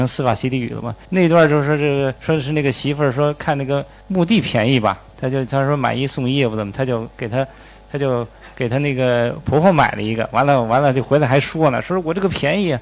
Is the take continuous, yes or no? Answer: no